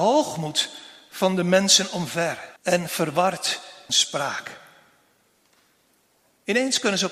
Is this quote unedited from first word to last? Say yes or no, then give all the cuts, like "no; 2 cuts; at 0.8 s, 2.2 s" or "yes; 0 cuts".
no; 2 cuts; at 2.6 s, 3.9 s